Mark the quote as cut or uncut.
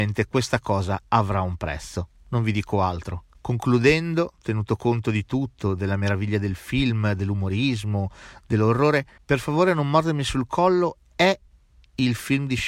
uncut